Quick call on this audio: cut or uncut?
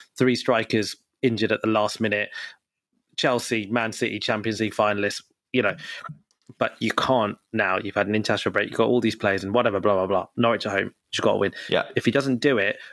uncut